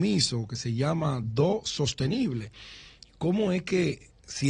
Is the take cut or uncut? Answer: uncut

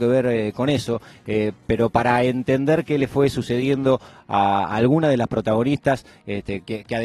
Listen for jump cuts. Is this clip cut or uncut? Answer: uncut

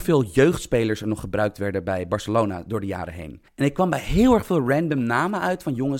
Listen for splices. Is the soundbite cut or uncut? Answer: cut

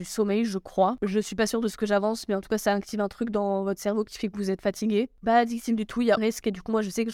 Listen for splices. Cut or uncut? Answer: cut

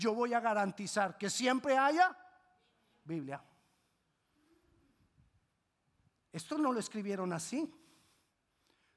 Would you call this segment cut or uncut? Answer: uncut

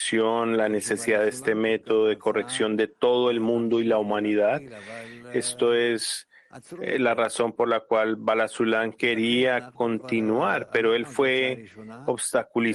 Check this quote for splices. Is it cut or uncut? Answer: uncut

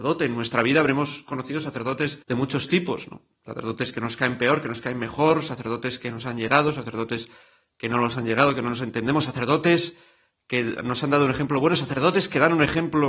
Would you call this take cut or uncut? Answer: cut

